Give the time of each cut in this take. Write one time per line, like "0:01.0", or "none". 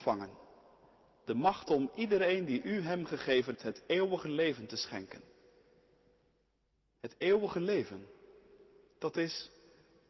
0:03.5